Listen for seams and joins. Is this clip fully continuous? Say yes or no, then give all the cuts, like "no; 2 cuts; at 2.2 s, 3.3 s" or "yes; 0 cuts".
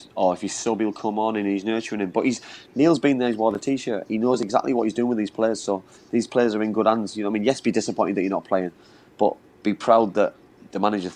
yes; 0 cuts